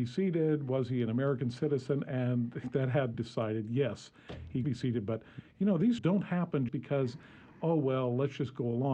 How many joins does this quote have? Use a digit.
4